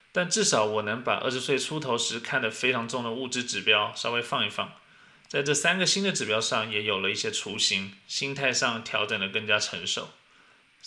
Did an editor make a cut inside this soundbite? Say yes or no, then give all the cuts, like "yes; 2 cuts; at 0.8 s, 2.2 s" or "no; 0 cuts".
no; 0 cuts